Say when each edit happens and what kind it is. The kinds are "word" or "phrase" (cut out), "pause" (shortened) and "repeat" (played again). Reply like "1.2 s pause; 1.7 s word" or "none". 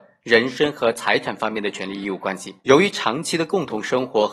2.6 s pause